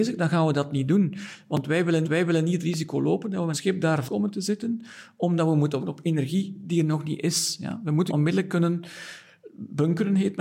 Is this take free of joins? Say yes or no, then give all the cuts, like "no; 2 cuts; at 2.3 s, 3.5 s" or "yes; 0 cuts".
no; 5 cuts; at 2.0 s, 3.5 s, 4.1 s, 5.8 s, 8.1 s